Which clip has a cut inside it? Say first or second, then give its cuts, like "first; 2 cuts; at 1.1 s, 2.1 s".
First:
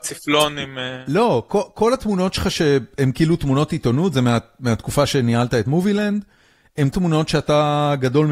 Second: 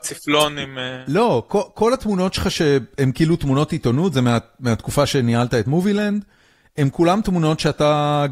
first; 1 cut; at 6.9 s